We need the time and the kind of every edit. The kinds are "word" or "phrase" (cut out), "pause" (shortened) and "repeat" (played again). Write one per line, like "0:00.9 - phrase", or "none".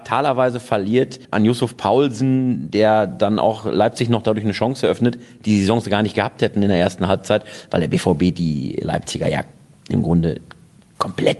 0:01.2 - pause